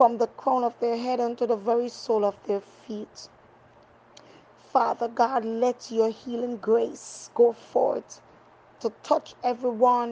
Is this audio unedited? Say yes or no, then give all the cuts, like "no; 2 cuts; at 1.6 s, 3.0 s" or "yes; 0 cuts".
yes; 0 cuts